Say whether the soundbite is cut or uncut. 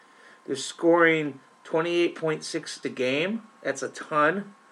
cut